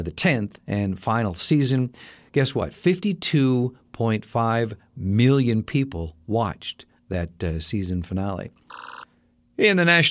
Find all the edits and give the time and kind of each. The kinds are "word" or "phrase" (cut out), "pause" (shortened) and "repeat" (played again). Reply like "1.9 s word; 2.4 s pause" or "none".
none